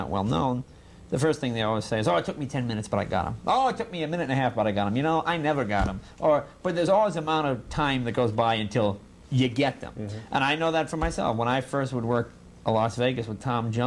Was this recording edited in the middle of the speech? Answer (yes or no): no